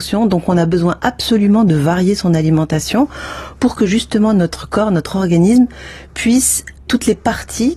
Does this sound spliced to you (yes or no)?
yes